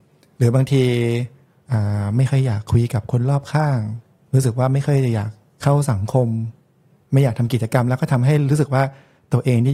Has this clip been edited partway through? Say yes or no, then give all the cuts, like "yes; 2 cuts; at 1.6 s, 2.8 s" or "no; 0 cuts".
yes; 1 cut; at 5.5 s